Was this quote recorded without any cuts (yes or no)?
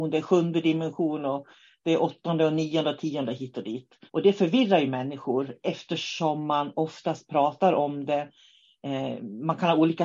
no